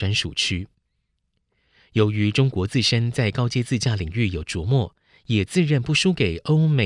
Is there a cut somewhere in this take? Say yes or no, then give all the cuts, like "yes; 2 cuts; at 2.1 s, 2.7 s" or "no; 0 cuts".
no; 0 cuts